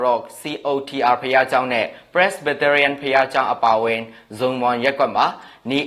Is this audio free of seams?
yes; 0 cuts

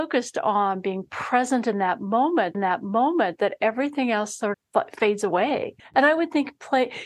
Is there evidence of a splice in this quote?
yes; 3 cuts; at 2.5 s, 4.5 s, 5.8 s

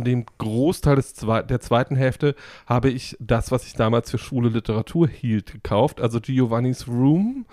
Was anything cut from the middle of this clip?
no; 0 cuts

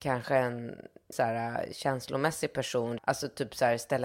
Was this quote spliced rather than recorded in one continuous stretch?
yes; 2 cuts; at 1.1 s, 3.0 s

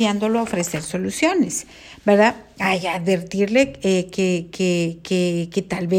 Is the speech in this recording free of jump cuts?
yes; 0 cuts

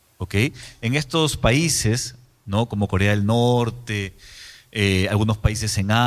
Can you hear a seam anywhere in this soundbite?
no; 0 cuts

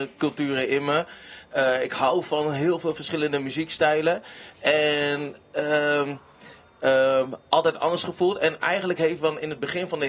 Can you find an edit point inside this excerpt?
no; 0 cuts

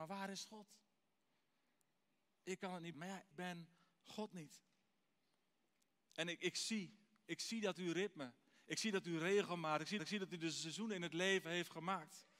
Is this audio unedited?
no; 3 cuts; at 2.9 s, 3.3 s, 10.0 s

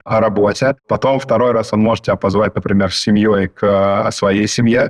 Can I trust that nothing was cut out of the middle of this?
yes; 0 cuts

